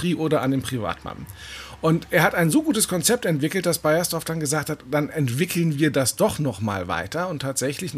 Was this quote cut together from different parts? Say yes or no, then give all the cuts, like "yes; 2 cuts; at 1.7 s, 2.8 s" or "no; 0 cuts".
no; 0 cuts